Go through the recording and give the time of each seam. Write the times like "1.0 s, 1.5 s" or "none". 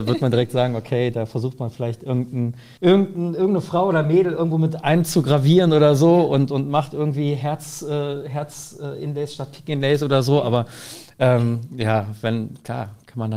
2.8 s